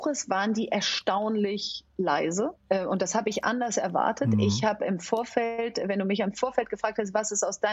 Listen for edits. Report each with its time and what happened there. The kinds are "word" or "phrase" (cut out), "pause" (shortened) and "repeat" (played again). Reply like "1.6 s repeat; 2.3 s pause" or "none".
2.6 s pause